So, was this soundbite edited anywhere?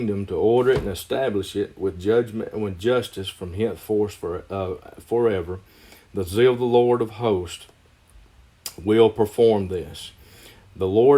no; 0 cuts

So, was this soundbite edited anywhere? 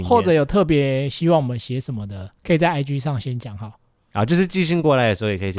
no; 0 cuts

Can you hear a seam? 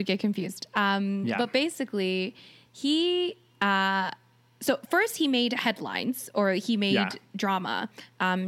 no; 0 cuts

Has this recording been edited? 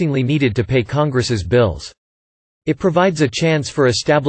no; 0 cuts

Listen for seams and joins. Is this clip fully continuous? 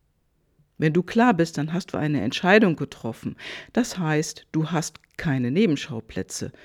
yes; 0 cuts

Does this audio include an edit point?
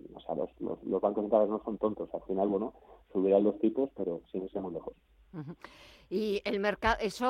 no; 0 cuts

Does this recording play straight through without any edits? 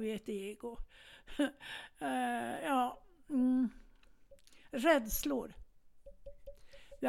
yes; 0 cuts

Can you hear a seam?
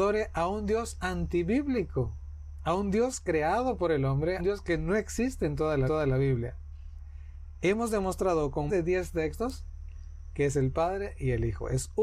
yes; 3 cuts; at 4.4 s, 5.9 s, 8.7 s

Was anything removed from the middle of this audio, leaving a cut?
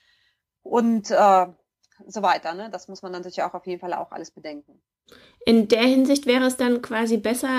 no; 0 cuts

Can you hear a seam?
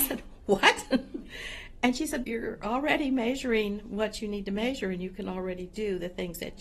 yes; 1 cut; at 2.2 s

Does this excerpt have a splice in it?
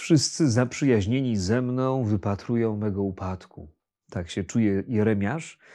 yes; 1 cut; at 3.8 s

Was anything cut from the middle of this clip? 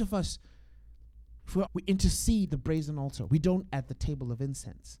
yes; 3 cuts; at 1.7 s, 2.5 s, 3.7 s

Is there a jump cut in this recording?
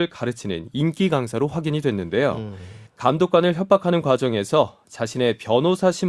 yes; 1 cut; at 2.9 s

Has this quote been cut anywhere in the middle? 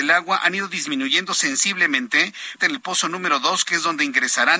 yes; 1 cut; at 2.6 s

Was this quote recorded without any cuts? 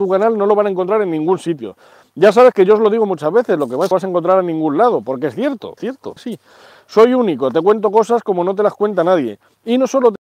no; 3 cuts; at 3.9 s, 5.8 s, 6.2 s

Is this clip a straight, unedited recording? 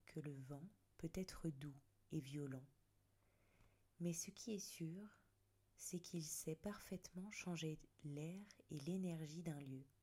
yes; 0 cuts

